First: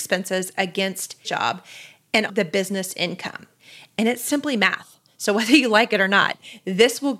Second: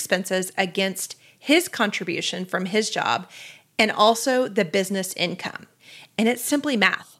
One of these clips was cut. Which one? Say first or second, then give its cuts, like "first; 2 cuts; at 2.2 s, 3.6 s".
first; 2 cuts; at 1.2 s, 2.3 s